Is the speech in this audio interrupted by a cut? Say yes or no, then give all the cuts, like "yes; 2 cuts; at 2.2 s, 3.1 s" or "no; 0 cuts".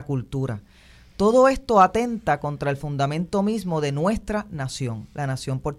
no; 0 cuts